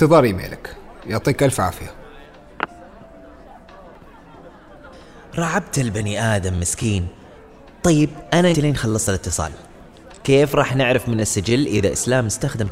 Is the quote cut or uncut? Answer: cut